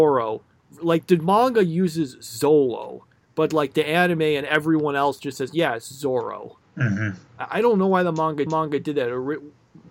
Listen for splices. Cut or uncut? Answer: cut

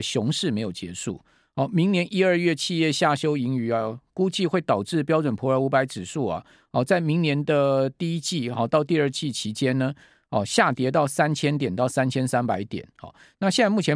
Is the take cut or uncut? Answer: uncut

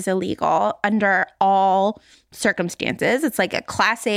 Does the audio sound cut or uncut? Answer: uncut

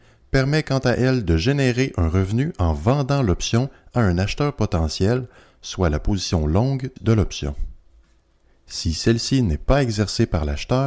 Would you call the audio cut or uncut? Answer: uncut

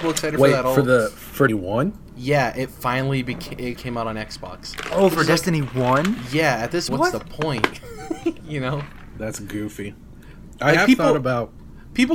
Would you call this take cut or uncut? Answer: cut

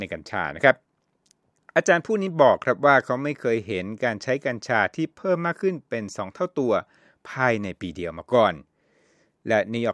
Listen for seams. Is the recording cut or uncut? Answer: uncut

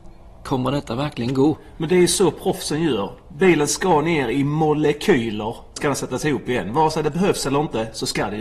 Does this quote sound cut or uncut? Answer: cut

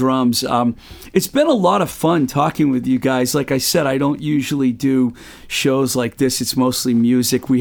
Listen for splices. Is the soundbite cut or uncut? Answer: uncut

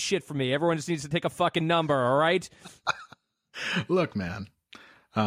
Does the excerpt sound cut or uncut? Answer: uncut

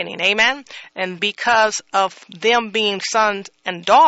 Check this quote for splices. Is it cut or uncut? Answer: cut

